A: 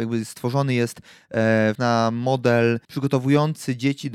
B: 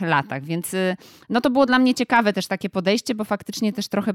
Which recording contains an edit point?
A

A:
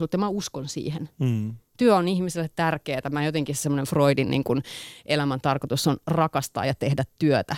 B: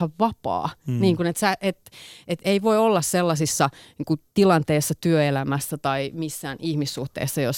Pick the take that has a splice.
B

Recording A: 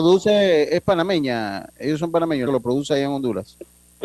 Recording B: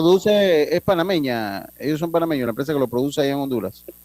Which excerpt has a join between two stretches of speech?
A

